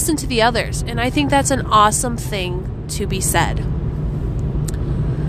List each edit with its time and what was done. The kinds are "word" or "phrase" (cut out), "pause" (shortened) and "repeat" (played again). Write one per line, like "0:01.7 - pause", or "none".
none

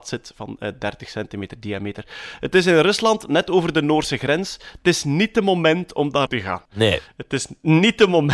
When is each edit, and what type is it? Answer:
0:06.3 - word

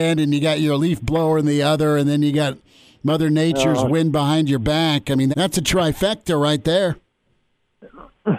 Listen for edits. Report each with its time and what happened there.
0:05.3 - word

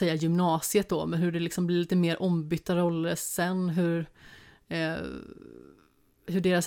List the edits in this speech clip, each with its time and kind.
none

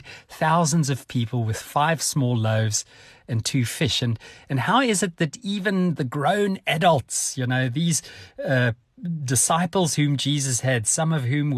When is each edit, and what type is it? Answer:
none

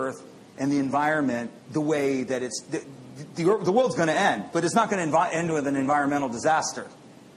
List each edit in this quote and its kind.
0:01.6 - pause

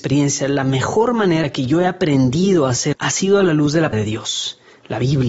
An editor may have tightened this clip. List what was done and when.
0:01.4 - word
0:02.9 - word
0:03.9 - word

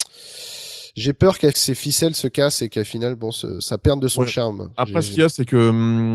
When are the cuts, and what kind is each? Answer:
0:01.5 - phrase

